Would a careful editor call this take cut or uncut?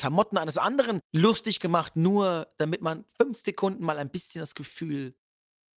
uncut